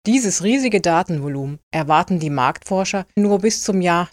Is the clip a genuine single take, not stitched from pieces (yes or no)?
no